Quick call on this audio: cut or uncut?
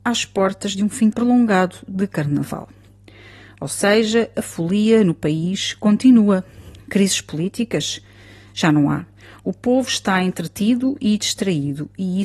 cut